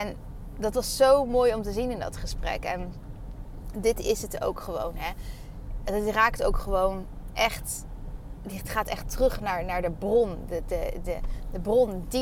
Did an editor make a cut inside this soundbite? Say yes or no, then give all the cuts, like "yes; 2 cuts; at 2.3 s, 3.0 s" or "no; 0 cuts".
no; 0 cuts